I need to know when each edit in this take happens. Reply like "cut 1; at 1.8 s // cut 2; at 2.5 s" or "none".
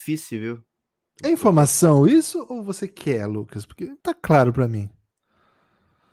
cut 1; at 4.0 s